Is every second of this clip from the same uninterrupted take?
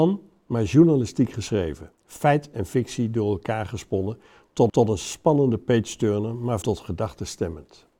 no; 3 cuts; at 1.9 s, 4.7 s, 6.6 s

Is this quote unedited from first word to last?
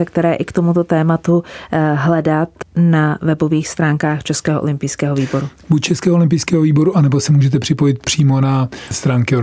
yes; 0 cuts

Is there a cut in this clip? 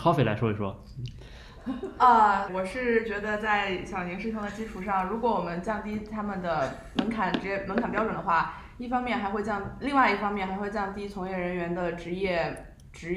yes; 1 cut; at 2.5 s

